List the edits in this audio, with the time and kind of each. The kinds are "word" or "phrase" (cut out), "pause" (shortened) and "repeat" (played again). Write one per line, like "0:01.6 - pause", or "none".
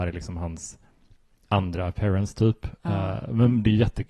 none